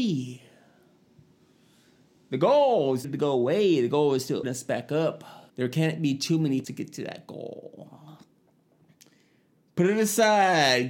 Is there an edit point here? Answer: yes; 4 cuts; at 3.0 s, 4.4 s, 5.5 s, 6.6 s

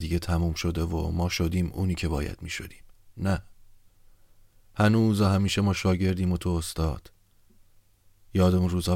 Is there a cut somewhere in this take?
no; 0 cuts

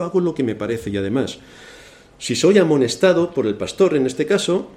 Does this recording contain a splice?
no; 0 cuts

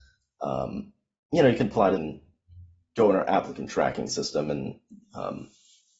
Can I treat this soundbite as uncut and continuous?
no; 1 cut; at 2.0 s

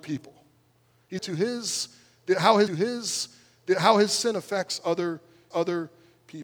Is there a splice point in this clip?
yes; 3 cuts; at 1.2 s, 2.7 s, 5.5 s

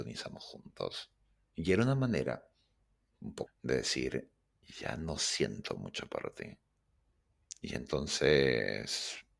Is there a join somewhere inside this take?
yes; 1 cut; at 3.5 s

